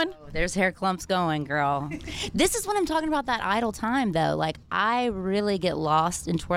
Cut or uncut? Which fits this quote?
uncut